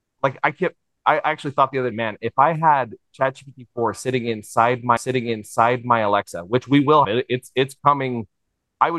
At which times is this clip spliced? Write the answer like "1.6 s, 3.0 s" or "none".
1.9 s, 5.0 s, 7.0 s